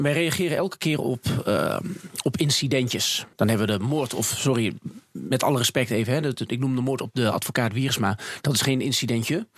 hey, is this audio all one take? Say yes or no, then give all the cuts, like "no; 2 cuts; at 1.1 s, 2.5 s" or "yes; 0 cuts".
no; 1 cut; at 3.3 s